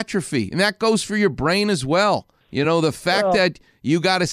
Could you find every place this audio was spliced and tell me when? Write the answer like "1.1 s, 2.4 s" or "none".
none